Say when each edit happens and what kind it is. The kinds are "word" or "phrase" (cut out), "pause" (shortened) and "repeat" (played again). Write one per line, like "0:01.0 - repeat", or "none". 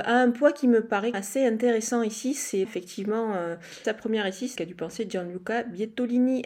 0:01.1 - phrase
0:02.6 - word
0:03.8 - phrase
0:04.6 - word